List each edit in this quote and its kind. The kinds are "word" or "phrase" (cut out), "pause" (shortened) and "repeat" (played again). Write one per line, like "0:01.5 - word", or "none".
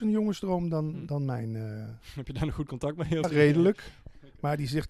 0:03.2 - word